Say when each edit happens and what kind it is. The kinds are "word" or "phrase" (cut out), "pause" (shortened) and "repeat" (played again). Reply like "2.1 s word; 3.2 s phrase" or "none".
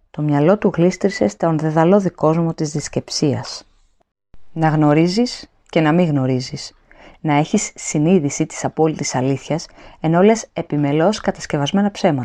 none